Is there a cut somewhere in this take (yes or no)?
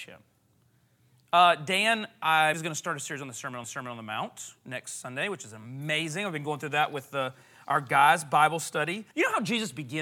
yes